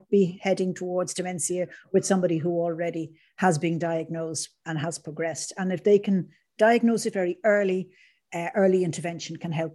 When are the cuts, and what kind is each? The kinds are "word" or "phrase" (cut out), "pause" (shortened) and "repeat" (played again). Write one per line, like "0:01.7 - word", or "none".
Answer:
none

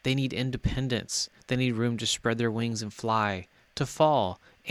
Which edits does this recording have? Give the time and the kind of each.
none

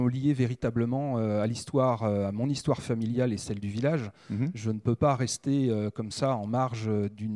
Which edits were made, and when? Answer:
none

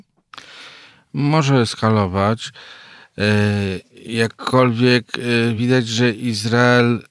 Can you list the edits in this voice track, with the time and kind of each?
none

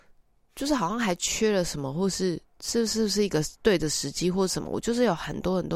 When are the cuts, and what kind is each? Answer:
0:03.6 - pause

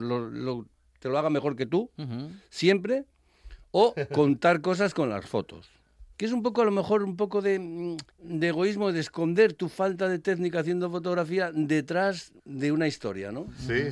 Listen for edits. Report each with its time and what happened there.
0:06.1 - pause
0:08.1 - pause
0:12.4 - pause

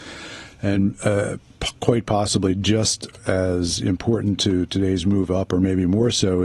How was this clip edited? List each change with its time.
none

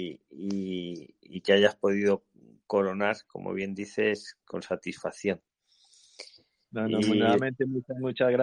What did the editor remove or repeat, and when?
0:04.4 - pause

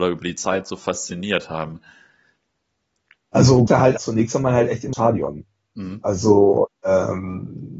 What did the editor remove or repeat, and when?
0:03.7 - word
0:04.0 - word
0:04.9 - word

